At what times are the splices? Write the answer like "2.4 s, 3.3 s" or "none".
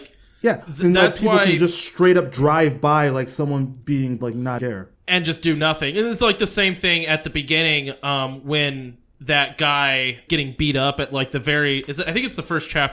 4.2 s, 4.6 s, 5.0 s, 10.3 s